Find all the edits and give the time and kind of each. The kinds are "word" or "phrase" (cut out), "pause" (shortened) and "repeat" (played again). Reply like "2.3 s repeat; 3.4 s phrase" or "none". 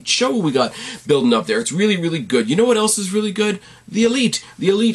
none